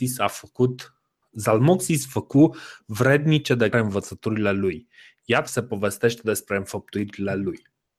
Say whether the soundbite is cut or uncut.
cut